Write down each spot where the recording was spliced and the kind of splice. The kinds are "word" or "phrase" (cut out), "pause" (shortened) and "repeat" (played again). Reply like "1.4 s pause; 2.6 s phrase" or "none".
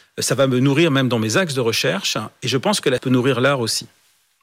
3.0 s word

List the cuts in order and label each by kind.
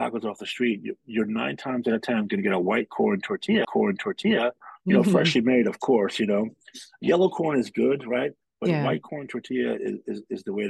3.6 s repeat

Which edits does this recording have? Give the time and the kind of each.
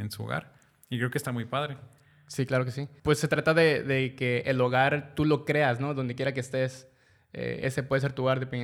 none

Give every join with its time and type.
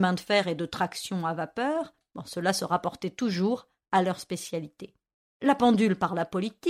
5.2 s pause

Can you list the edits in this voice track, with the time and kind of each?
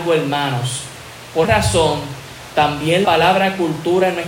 1.4 s word; 3.0 s word

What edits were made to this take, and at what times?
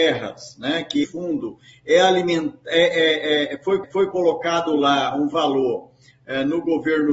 1.0 s word; 3.8 s repeat

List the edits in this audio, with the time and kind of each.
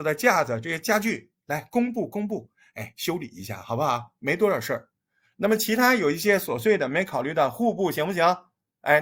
none

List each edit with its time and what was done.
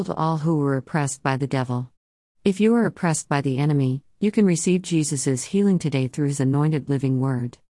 none

